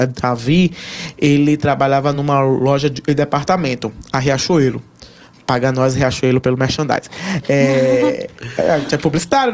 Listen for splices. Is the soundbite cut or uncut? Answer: uncut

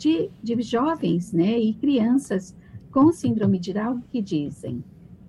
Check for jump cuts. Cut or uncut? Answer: cut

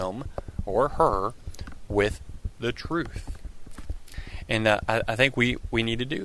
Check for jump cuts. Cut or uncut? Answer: uncut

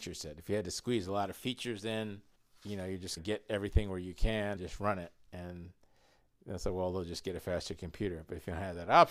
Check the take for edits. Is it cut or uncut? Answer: cut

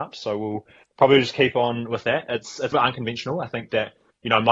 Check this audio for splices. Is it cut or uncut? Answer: cut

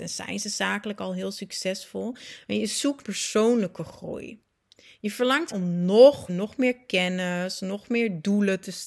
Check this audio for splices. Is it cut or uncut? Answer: cut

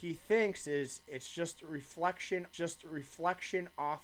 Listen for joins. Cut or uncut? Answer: cut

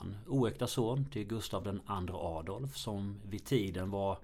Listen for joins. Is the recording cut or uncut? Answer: uncut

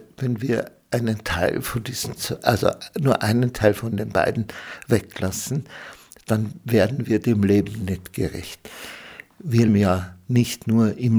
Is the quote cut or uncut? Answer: cut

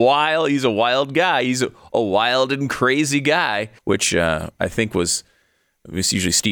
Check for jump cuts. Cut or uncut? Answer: cut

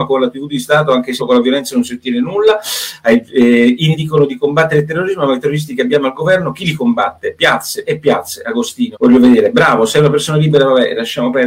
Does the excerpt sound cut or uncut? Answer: cut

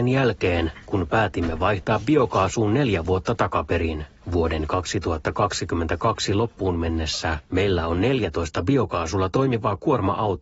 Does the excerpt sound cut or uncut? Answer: uncut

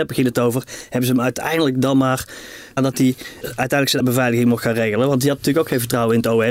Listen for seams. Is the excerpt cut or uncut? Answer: cut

